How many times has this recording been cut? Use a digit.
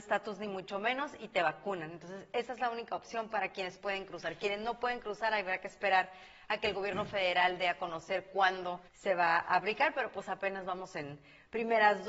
1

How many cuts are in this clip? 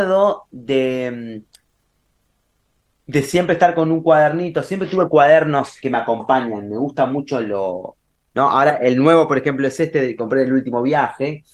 2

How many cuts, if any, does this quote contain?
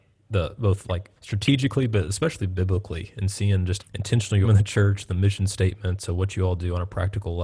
3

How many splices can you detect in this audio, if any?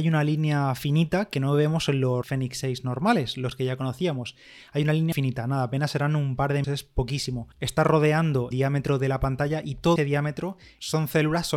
6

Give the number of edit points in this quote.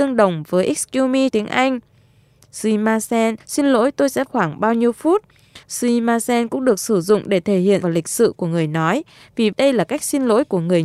6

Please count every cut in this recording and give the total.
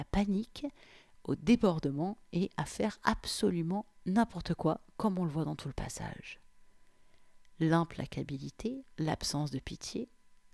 1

